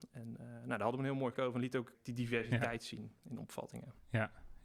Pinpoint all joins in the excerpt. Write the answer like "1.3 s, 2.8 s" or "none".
1.3 s, 1.9 s